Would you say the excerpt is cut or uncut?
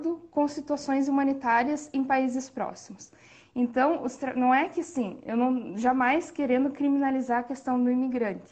uncut